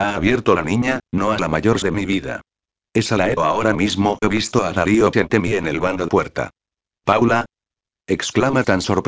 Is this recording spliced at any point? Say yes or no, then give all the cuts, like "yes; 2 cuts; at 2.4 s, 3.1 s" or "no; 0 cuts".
yes; 6 cuts; at 1.4 s, 1.8 s, 3.4 s, 4.2 s, 5.1 s, 6.1 s